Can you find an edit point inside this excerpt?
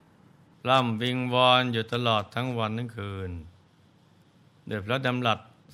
no; 0 cuts

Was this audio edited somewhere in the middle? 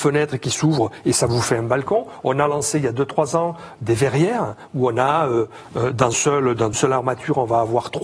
yes; 2 cuts; at 6.1 s, 6.7 s

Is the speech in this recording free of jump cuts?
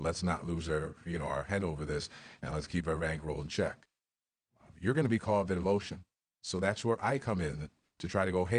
yes; 0 cuts

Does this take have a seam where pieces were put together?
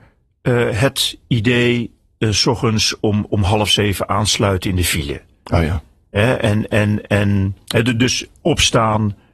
no; 0 cuts

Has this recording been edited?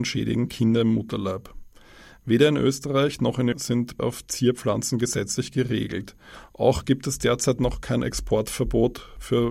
yes; 2 cuts; at 3.5 s, 4.0 s

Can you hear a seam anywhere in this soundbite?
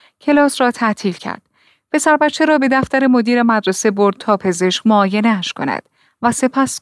no; 0 cuts

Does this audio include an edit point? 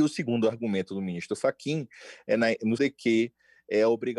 yes; 1 cut; at 2.8 s

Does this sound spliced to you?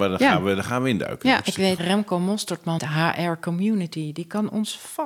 yes; 2 cuts; at 1.8 s, 2.8 s

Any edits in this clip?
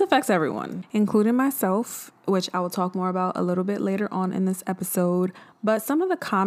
no; 0 cuts

